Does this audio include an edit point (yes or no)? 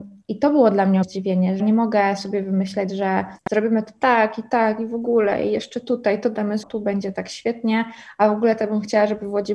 yes